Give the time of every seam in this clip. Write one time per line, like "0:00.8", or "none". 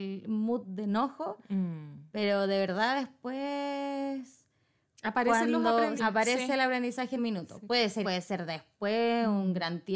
0:06.0
0:07.2
0:08.0